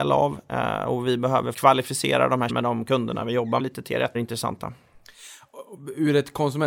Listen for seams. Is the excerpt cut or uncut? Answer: cut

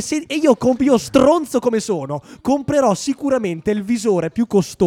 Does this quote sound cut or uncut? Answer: uncut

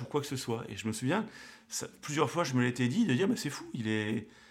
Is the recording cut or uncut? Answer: uncut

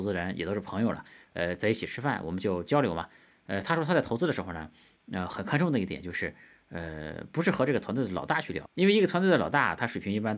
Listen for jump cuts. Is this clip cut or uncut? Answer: uncut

